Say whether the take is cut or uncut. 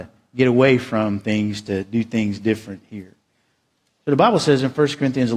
uncut